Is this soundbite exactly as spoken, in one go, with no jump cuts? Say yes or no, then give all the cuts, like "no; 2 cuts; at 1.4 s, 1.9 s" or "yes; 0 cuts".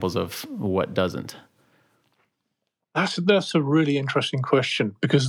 yes; 0 cuts